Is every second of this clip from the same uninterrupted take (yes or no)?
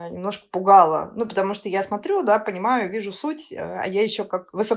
yes